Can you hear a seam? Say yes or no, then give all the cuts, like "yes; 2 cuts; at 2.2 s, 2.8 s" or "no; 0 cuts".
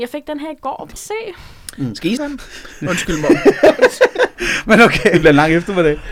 yes; 2 cuts; at 1.0 s, 2.2 s